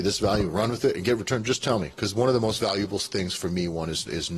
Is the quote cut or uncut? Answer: uncut